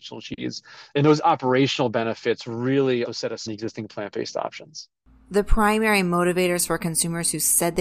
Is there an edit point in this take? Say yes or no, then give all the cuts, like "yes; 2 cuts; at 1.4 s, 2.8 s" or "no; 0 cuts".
yes; 3 cuts; at 3.0 s, 3.5 s, 5.0 s